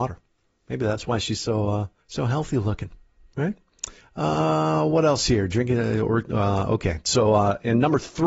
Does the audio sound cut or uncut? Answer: cut